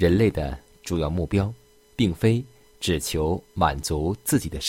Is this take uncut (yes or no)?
yes